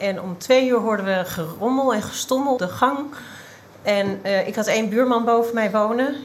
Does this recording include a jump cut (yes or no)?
yes